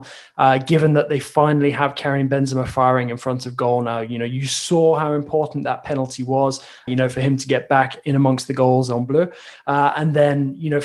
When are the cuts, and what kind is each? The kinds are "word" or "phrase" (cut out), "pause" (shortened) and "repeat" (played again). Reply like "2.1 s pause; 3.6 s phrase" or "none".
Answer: 6.9 s word